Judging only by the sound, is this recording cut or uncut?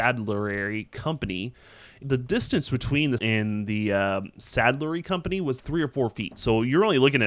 cut